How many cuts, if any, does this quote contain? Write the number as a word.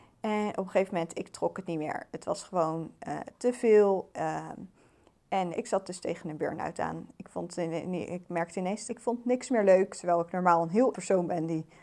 three